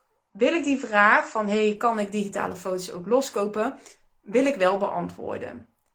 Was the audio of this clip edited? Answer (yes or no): no